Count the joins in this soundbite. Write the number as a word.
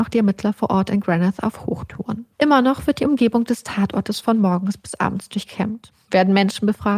one